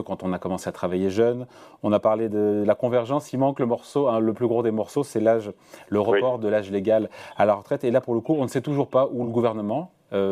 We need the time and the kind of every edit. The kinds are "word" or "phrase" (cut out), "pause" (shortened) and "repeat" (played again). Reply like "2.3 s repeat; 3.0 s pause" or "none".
none